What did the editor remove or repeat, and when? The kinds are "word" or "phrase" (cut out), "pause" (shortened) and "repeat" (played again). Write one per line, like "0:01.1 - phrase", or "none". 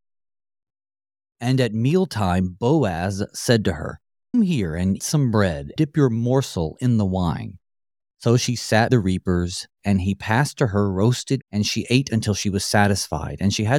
0:04.3 - word
0:05.0 - word
0:05.8 - word
0:08.9 - word
0:11.4 - word